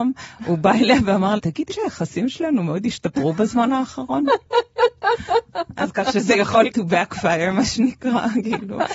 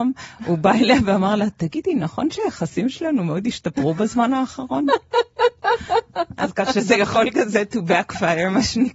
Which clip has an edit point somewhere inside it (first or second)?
first